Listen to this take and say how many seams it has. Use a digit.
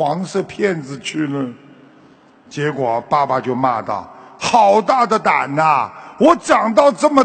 0